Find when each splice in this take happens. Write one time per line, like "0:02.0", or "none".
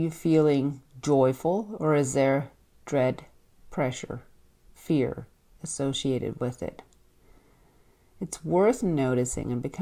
none